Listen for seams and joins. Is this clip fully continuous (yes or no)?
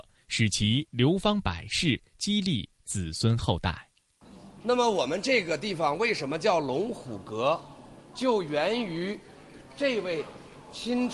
yes